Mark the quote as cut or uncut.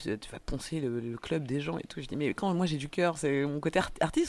uncut